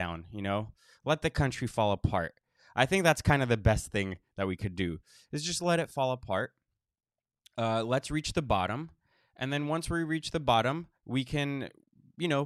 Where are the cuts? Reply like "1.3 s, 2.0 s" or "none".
11.0 s